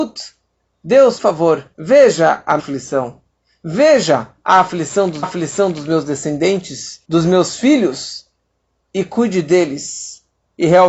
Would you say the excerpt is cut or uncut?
cut